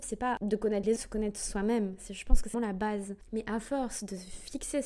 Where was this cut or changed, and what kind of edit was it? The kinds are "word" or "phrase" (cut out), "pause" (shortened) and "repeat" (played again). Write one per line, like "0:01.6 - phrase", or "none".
0:01.0 - phrase
0:02.5 - word